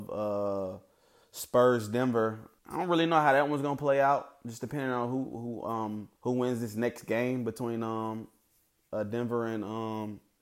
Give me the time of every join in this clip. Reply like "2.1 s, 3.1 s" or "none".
2.6 s, 6.1 s